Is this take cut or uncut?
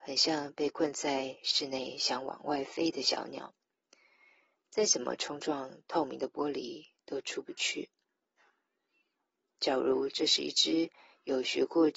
uncut